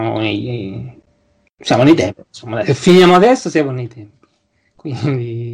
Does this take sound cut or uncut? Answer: uncut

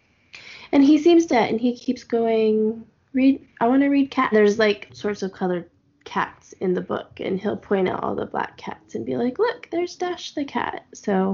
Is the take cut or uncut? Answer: cut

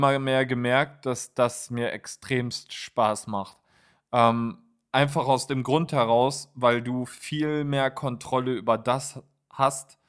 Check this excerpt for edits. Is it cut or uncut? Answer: uncut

